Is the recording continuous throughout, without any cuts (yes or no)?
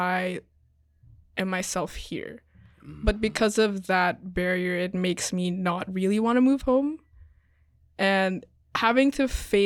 no